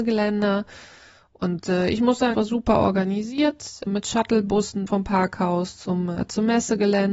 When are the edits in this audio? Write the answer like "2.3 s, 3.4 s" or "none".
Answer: 2.3 s, 3.9 s, 4.9 s